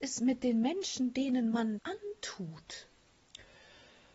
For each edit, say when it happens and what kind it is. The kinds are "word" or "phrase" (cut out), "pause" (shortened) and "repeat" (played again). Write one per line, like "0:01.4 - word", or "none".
0:01.8 - word